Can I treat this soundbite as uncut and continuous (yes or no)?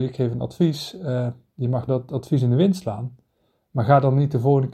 no